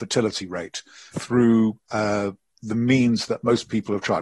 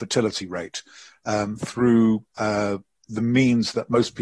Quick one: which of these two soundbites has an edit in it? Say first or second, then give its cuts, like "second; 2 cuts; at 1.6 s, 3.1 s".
first; 1 cut; at 1.1 s